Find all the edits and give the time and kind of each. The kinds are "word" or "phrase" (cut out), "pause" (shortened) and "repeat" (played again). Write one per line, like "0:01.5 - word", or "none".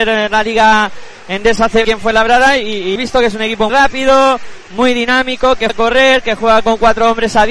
0:01.8 - word
0:03.0 - word
0:03.7 - word
0:05.7 - word